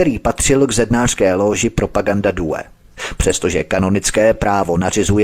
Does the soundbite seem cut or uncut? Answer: uncut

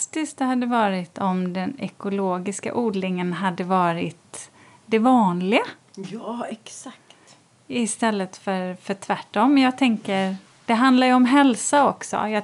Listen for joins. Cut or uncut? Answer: uncut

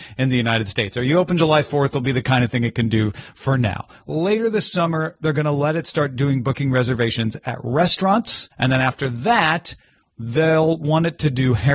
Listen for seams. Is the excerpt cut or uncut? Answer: cut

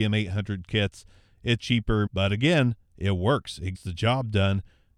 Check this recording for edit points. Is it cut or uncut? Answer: cut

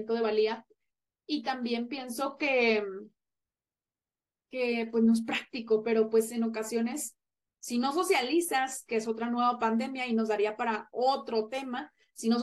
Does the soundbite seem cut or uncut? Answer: uncut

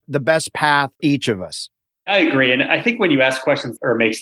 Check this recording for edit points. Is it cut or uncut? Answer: cut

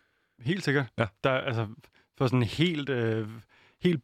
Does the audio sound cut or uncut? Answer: uncut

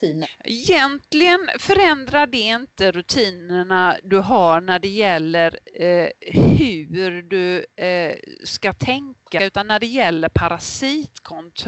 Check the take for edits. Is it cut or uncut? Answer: uncut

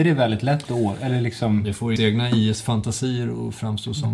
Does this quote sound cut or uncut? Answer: cut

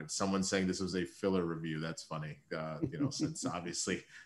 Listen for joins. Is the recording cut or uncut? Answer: uncut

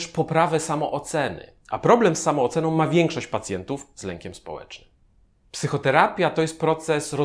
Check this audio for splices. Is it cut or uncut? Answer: cut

